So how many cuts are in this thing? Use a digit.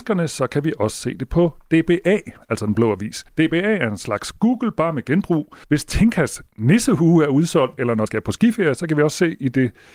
3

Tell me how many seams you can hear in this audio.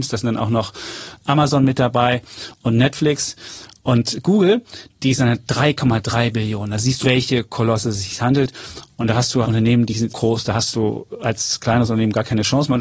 4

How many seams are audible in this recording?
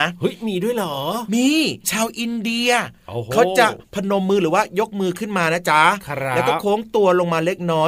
1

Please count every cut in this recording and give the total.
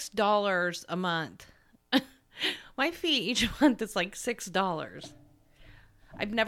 0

